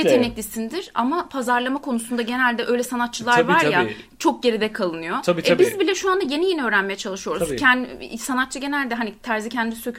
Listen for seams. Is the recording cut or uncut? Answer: uncut